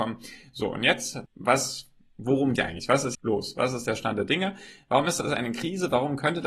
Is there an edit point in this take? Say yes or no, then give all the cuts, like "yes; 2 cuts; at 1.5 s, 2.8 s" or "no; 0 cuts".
yes; 3 cuts; at 1.2 s, 2.6 s, 3.1 s